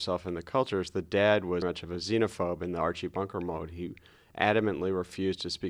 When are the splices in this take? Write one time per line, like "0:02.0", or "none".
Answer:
0:01.6